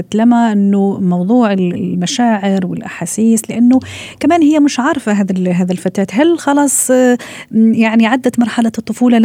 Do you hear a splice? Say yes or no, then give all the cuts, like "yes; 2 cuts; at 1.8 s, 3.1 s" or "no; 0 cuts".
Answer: no; 0 cuts